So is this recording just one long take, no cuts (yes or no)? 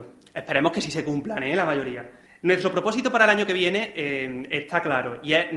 no